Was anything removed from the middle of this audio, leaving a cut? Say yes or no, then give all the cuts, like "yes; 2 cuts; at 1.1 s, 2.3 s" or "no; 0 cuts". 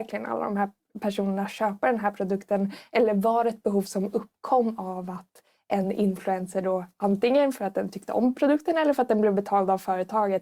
no; 0 cuts